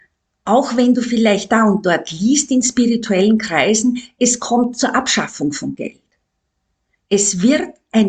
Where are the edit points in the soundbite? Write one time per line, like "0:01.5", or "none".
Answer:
none